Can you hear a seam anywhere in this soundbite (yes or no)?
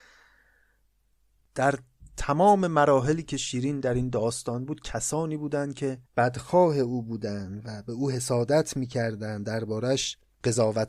yes